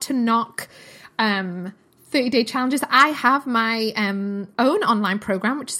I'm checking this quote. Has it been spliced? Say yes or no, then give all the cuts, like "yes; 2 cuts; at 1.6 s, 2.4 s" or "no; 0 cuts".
no; 0 cuts